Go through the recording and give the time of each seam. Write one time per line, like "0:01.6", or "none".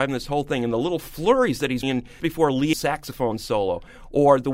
0:01.8
0:02.2
0:02.7